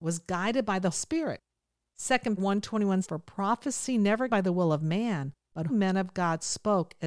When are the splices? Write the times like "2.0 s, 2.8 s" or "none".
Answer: 0.9 s, 2.4 s, 3.0 s, 4.3 s, 5.7 s